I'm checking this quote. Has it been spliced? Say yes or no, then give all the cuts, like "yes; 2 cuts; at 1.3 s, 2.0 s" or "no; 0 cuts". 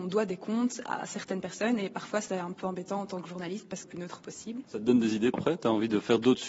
yes; 2 cuts; at 3.8 s, 5.3 s